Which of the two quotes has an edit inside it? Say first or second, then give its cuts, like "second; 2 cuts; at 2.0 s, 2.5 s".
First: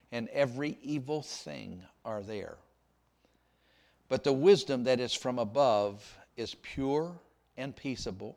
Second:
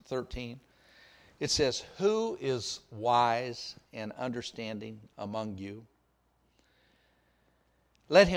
first; 1 cut; at 6.3 s